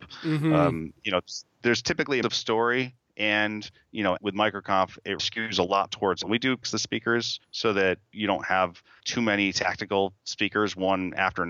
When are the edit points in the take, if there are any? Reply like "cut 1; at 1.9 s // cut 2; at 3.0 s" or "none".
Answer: cut 1; at 1.6 s // cut 2; at 2.2 s // cut 3; at 4.2 s // cut 4; at 5.2 s // cut 5; at 5.9 s // cut 6; at 6.2 s // cut 7; at 6.6 s // cut 8; at 7.4 s // cut 9; at 9.0 s